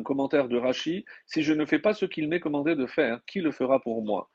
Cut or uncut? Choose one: uncut